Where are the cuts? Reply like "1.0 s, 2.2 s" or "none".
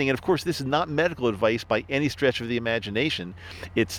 none